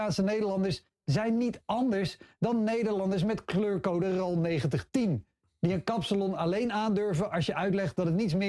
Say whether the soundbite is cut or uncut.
uncut